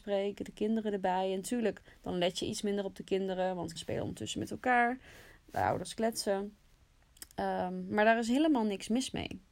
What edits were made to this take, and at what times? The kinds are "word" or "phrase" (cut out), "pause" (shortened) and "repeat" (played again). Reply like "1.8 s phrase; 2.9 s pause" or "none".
3.8 s word